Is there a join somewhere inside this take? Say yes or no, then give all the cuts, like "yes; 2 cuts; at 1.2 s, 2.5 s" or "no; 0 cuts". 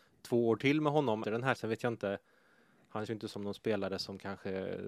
yes; 3 cuts; at 1.2 s, 1.6 s, 3.1 s